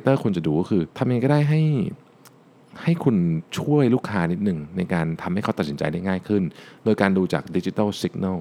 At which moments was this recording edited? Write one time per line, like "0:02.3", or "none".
0:00.9